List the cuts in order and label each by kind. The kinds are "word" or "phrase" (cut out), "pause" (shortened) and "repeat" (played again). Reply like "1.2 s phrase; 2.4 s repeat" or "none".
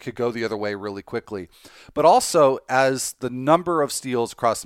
none